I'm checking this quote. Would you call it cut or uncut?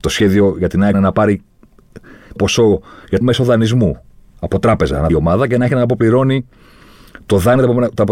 cut